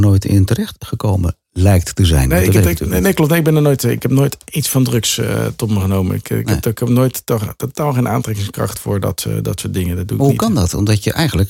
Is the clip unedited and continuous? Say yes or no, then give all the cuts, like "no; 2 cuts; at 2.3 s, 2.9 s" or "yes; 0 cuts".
yes; 0 cuts